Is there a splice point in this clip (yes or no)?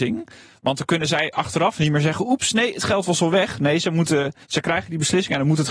yes